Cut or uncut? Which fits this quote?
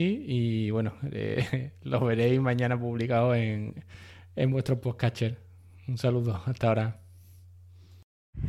uncut